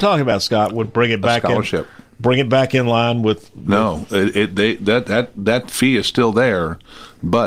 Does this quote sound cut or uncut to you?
uncut